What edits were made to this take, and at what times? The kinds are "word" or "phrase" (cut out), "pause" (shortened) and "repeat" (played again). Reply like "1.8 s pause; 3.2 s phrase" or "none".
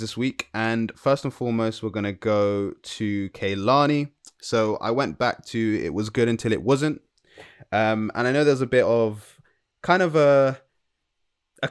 none